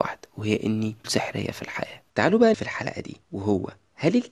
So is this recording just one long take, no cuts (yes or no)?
no